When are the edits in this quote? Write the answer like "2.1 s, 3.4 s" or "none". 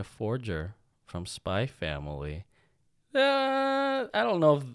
none